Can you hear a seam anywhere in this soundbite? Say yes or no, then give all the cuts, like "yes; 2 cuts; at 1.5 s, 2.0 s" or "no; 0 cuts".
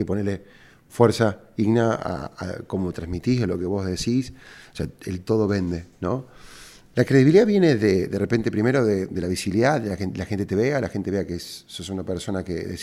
no; 0 cuts